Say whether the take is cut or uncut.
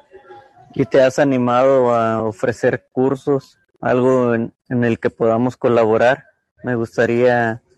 uncut